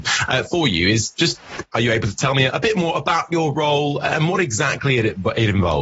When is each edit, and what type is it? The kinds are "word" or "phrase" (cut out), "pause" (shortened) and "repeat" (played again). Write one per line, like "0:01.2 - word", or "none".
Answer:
none